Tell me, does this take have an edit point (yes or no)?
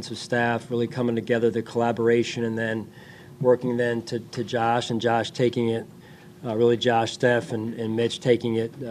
no